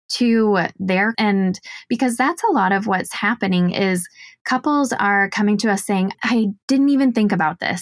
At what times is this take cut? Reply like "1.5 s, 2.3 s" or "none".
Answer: 1.1 s, 6.1 s